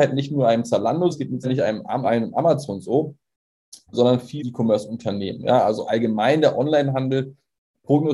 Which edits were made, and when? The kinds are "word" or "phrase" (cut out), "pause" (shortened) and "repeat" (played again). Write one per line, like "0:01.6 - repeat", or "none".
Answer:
0:01.1 - word
0:01.4 - word
0:02.0 - word
0:03.9 - word
0:04.4 - word
0:05.8 - word